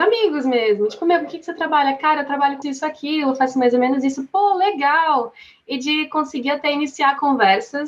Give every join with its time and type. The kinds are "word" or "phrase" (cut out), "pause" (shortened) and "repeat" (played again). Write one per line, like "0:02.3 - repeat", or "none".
0:02.6 - word